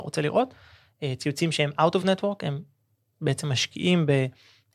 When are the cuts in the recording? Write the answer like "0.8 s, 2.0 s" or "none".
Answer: none